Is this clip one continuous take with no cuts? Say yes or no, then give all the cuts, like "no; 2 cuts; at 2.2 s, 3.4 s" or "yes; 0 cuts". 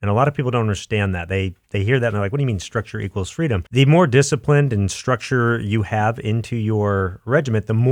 no; 1 cut; at 3.7 s